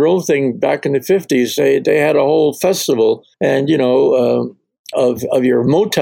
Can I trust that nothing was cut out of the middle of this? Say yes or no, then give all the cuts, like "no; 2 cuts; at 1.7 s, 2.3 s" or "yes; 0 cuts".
no; 2 cuts; at 3.3 s, 4.9 s